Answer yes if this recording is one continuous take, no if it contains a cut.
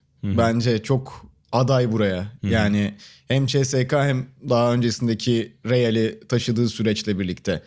yes